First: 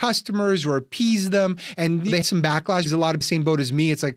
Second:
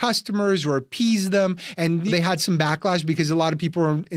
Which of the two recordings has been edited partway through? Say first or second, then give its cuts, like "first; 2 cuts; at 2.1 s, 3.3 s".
first; 3 cuts; at 2.2 s, 2.9 s, 3.2 s